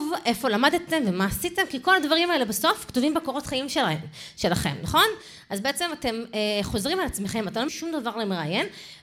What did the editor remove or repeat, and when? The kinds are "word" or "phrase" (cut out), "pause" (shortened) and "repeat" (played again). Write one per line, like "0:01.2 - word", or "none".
0:07.7 - word